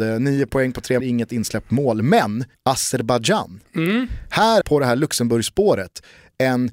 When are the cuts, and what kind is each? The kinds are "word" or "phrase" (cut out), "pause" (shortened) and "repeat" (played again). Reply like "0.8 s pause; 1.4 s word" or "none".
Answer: 1.0 s word; 2.5 s pause; 4.6 s phrase